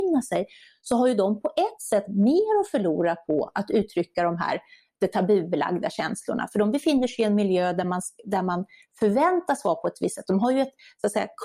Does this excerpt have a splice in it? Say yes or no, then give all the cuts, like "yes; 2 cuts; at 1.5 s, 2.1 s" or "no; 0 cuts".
no; 0 cuts